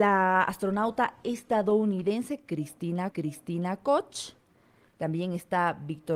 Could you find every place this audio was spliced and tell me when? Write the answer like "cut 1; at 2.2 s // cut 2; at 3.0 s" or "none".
cut 1; at 3.1 s